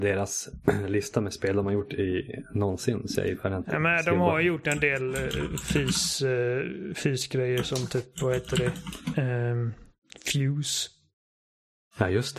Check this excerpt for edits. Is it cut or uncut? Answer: uncut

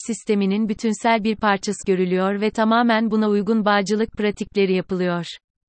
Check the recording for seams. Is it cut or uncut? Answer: cut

